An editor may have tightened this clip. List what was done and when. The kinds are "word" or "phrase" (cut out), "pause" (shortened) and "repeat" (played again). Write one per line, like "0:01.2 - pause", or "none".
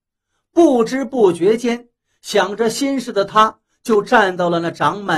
none